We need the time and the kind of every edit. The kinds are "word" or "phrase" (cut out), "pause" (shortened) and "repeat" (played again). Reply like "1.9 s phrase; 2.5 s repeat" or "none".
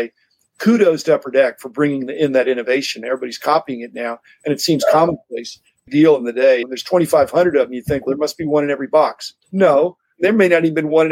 5.9 s phrase; 9.4 s pause